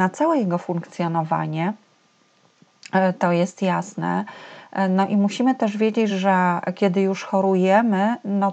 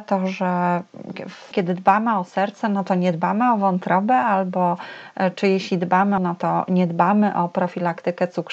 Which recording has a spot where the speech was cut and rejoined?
second; 2 cuts; at 1.5 s, 6.2 s

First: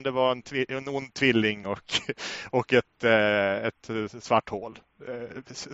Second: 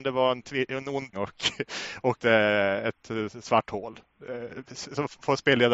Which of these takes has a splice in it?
second; 2 cuts; at 1.1 s, 2.2 s

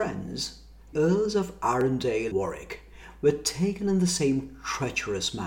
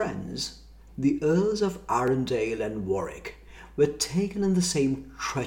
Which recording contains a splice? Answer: first; 2 cuts; at 0.9 s, 2.3 s

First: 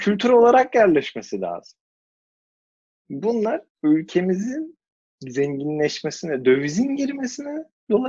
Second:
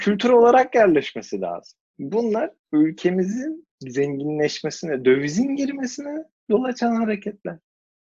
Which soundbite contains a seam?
second; 2 cuts; at 1.9 s, 3.7 s

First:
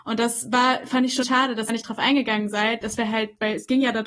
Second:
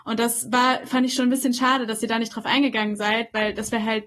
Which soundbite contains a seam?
first; 3 cuts; at 1.2 s, 1.7 s, 2.8 s

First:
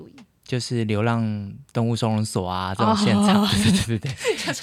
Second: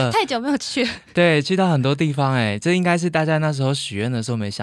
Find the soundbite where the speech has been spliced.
first; 1 cut; at 1.7 s

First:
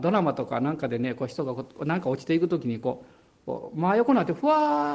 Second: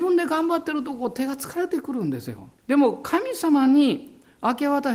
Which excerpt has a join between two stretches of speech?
second; 1 cut; at 2.6 s

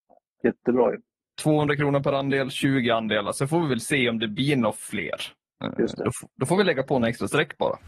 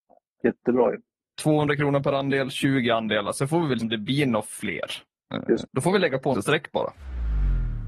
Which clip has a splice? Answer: second; 3 cuts; at 3.8 s, 5.7 s, 6.3 s

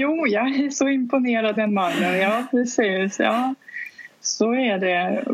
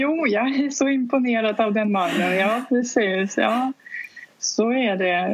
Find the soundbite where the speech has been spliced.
first; 1 cut; at 1.6 s

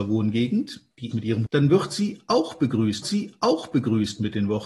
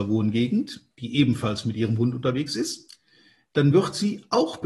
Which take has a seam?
first; 3 cuts; at 1.1 s, 1.5 s, 3.0 s

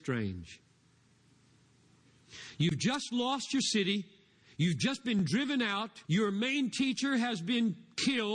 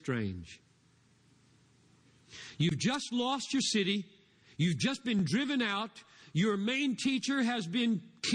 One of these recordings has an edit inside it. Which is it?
first; 1 cut; at 6.0 s

